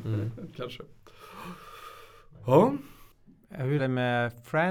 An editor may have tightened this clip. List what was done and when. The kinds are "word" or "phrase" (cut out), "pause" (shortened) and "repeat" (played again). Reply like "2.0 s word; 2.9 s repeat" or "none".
3.8 s word